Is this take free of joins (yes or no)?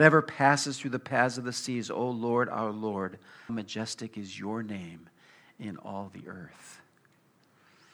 no